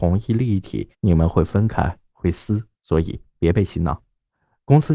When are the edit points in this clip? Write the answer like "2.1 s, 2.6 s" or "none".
0.9 s, 2.8 s